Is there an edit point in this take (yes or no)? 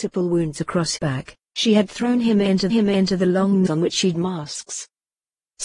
yes